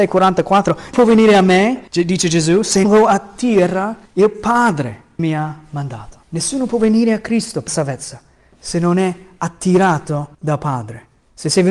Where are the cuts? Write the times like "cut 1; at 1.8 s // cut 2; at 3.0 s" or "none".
cut 1; at 0.9 s // cut 2; at 1.9 s // cut 3; at 2.8 s // cut 4; at 4.1 s // cut 5; at 5.2 s // cut 6; at 6.2 s // cut 7; at 7.7 s // cut 8; at 10.3 s